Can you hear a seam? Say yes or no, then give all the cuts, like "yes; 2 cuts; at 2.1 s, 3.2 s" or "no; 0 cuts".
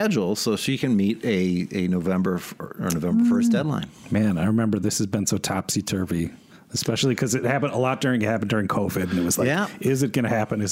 no; 0 cuts